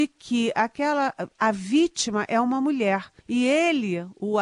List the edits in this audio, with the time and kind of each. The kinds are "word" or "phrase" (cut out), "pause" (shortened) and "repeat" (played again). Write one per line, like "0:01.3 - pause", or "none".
0:03.2 - pause